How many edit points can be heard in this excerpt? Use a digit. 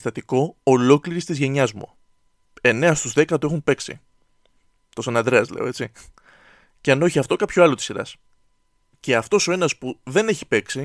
0